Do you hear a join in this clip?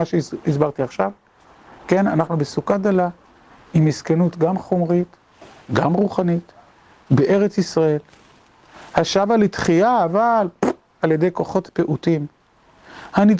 no; 0 cuts

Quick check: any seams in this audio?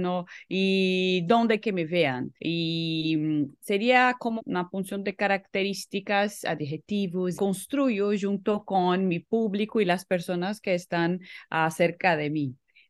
yes; 4 cuts; at 1.6 s, 2.4 s, 4.4 s, 7.4 s

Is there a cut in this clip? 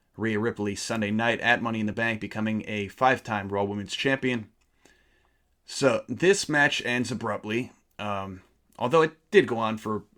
no; 0 cuts

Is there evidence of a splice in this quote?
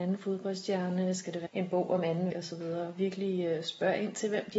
yes; 2 cuts; at 1.5 s, 2.3 s

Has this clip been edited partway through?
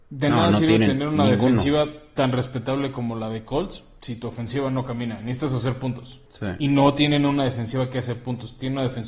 yes; 1 cut; at 6.3 s

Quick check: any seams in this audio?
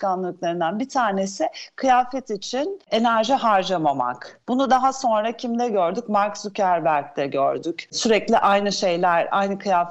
no; 0 cuts

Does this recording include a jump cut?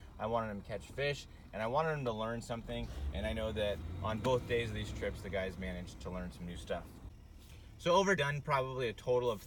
yes; 1 cut; at 8.2 s

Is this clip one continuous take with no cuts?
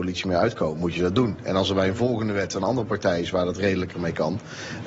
yes; 0 cuts

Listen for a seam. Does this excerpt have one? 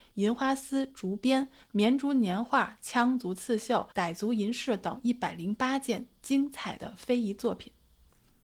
yes; 1 cut; at 3.9 s

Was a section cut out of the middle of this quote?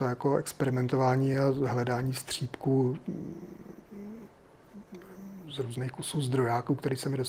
no; 0 cuts

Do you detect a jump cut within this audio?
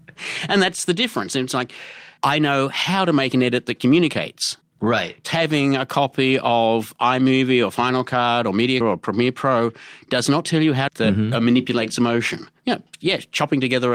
yes; 5 cuts; at 2.2 s, 5.2 s, 8.8 s, 10.9 s, 12.6 s

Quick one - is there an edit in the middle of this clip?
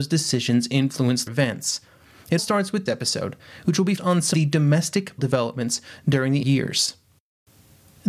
yes; 7 cuts; at 1.3 s, 2.4 s, 2.9 s, 4.0 s, 4.3 s, 5.2 s, 6.4 s

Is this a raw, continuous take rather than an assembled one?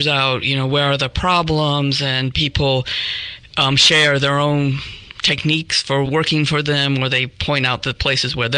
no; 1 cut; at 6.0 s

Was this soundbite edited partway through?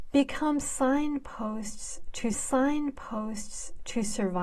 yes; 1 cut; at 2.3 s

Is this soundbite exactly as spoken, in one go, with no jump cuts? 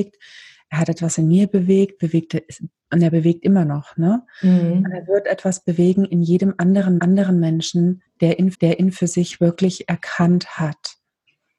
no; 2 cuts; at 7.0 s, 8.5 s

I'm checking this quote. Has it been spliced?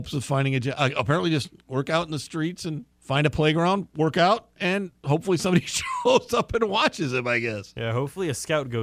yes; 1 cut; at 2.9 s

